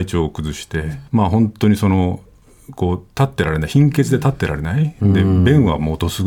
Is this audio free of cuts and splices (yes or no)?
no